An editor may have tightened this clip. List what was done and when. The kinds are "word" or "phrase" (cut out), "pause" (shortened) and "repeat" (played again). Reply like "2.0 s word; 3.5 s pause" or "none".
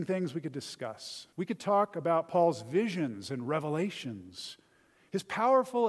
1.3 s pause

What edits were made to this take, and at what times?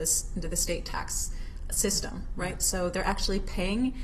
none

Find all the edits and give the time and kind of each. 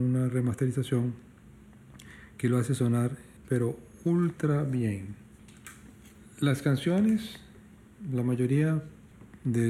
3.4 s pause

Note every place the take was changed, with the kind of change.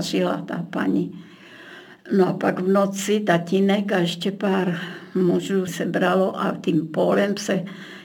5.7 s word

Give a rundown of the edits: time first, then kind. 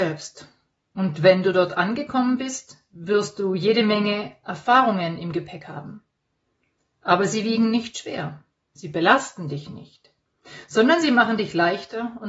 none

